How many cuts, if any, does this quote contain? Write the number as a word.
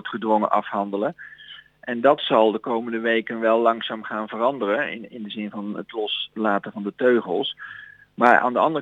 zero